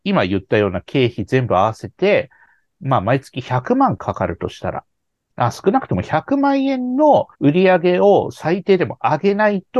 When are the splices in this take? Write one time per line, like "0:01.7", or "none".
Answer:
0:07.3